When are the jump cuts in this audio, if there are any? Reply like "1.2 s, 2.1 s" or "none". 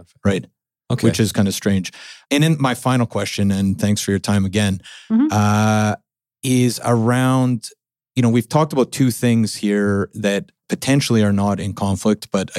none